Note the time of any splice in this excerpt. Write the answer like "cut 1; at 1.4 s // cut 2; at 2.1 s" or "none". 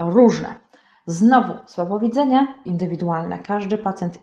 cut 1; at 2.7 s